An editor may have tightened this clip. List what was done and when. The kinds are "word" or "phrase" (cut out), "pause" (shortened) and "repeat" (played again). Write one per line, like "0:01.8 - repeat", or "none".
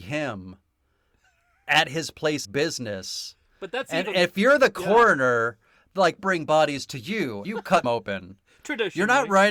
0:02.4 - word
0:06.2 - word
0:07.4 - word
0:07.8 - word